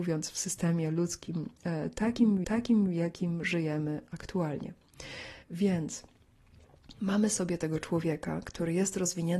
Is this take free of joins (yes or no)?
no